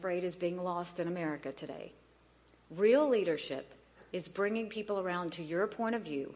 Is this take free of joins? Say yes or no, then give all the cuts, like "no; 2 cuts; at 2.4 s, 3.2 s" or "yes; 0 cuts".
yes; 0 cuts